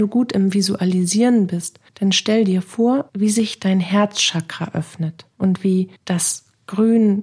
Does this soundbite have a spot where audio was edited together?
yes; 4 cuts; at 1.9 s, 3.1 s, 5.3 s, 6.0 s

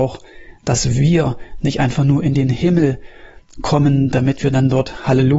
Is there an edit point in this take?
no; 0 cuts

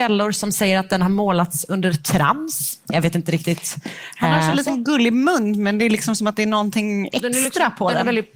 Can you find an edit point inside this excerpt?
no; 0 cuts

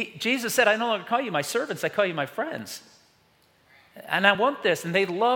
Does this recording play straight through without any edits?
yes; 0 cuts

